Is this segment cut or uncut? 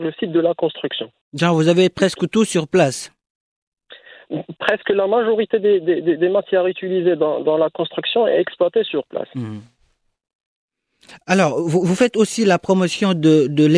uncut